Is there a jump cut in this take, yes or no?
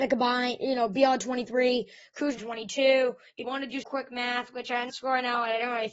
yes